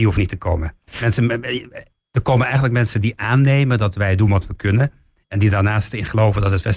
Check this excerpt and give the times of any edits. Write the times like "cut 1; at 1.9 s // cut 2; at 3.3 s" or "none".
none